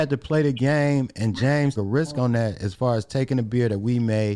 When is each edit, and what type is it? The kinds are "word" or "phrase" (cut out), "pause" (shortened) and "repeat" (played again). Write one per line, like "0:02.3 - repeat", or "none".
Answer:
0:01.8 - word